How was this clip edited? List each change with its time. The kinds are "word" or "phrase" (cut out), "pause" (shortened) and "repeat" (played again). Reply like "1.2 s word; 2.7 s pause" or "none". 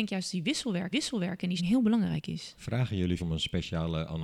0.9 s repeat; 1.6 s word; 3.2 s phrase